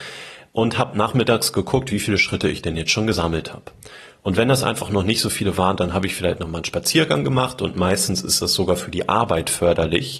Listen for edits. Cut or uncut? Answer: uncut